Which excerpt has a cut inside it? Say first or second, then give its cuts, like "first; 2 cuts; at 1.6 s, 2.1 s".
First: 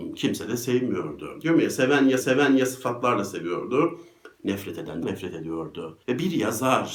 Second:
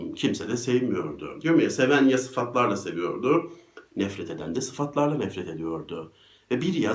first; 3 cuts; at 2.2 s, 5.0 s, 6.0 s